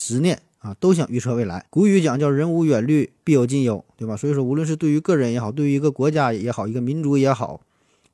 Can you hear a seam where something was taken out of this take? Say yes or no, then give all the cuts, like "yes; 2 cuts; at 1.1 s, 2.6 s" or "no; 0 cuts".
yes; 1 cut; at 1.7 s